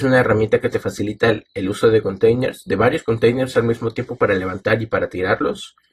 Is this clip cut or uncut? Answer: uncut